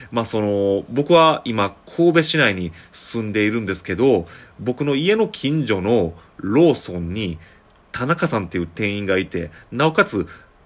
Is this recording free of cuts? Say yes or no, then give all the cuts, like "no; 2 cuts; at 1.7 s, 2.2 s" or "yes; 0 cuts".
yes; 0 cuts